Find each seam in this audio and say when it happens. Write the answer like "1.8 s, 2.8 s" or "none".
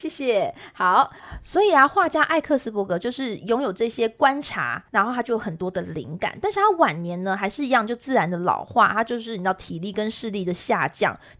4.9 s

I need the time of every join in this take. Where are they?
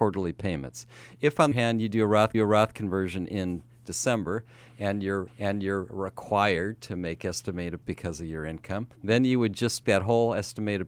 1.5 s, 2.3 s, 5.3 s, 7.8 s, 8.9 s, 9.8 s

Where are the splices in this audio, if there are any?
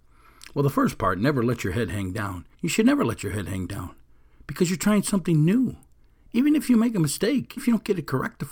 2.5 s, 7.6 s

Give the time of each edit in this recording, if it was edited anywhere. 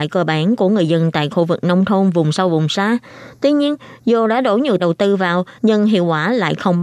4.8 s, 5.6 s

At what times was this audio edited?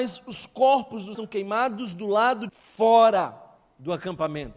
1.1 s, 2.5 s

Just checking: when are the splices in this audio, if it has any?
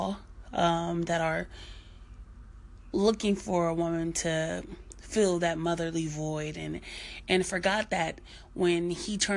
none

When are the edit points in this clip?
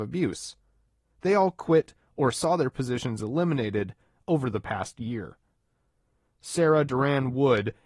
none

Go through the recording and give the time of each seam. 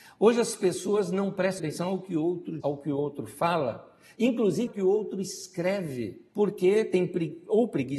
1.6 s, 2.6 s, 4.7 s, 6.3 s

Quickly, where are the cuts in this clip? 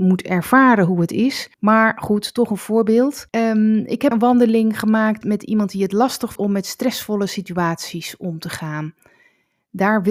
1.5 s, 3.3 s, 4.1 s, 5.2 s, 6.4 s

